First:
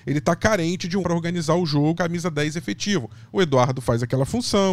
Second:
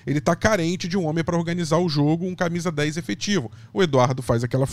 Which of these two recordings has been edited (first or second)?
first